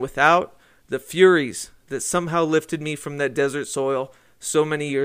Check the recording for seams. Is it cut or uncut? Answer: uncut